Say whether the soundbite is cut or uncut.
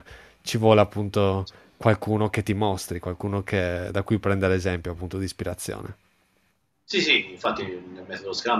uncut